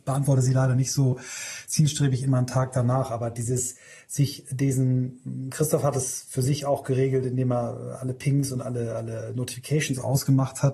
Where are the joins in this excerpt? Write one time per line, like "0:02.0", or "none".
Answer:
none